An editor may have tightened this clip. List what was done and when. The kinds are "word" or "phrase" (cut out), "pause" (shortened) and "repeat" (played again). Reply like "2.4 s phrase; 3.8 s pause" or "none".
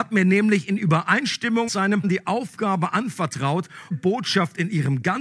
1.7 s word; 2.0 s word; 3.9 s phrase